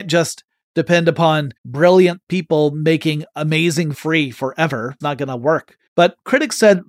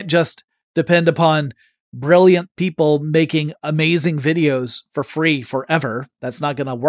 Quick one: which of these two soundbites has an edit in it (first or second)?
first